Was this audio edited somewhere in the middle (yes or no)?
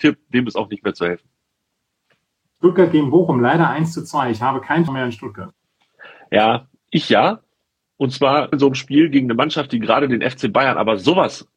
yes